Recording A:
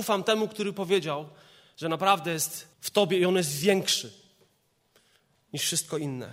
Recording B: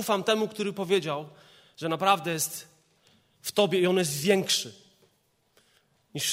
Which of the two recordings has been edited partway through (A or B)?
A